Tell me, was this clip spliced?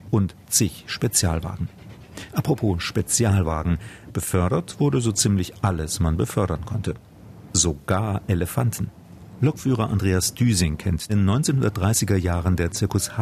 yes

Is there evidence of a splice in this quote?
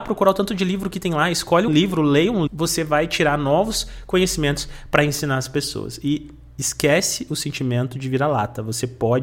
yes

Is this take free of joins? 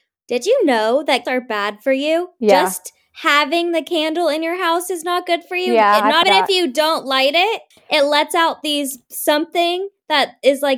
no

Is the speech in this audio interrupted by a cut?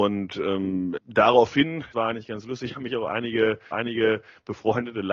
yes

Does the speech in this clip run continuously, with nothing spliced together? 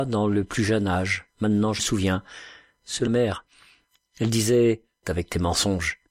no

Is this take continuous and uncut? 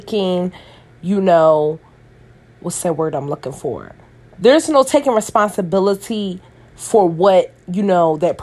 yes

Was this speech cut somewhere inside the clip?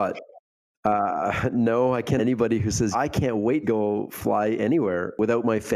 yes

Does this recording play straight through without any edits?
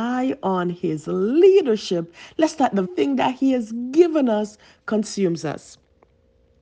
no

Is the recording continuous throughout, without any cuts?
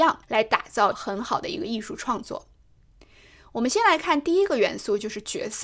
yes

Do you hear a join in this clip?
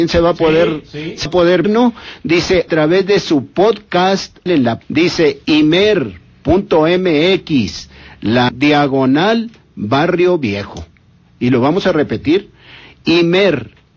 yes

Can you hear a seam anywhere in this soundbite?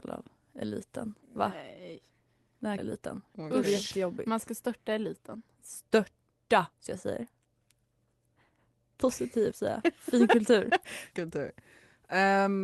yes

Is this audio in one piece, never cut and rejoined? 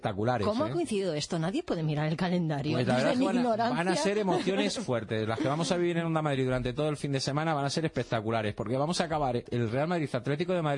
no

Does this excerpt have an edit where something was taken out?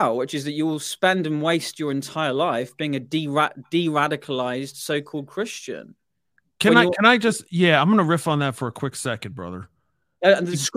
no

